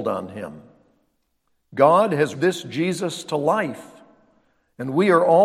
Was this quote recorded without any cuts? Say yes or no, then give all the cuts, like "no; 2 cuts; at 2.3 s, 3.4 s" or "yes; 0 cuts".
no; 1 cut; at 2.3 s